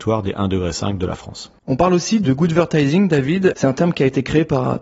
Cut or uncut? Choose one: cut